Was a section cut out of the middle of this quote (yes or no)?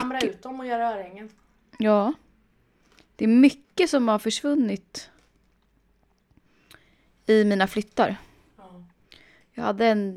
no